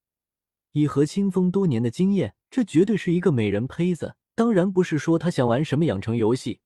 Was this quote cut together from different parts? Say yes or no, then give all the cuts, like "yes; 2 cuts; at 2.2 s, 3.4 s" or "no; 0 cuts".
yes; 2 cuts; at 2.4 s, 4.2 s